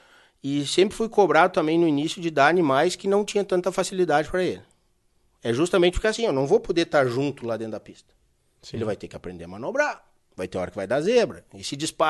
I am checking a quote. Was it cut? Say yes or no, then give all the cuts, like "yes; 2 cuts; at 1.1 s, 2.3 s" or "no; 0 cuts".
no; 0 cuts